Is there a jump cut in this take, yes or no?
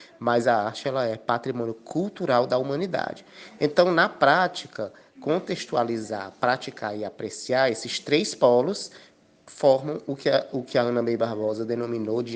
no